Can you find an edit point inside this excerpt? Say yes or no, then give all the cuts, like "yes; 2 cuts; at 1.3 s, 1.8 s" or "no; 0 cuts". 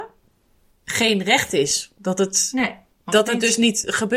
no; 0 cuts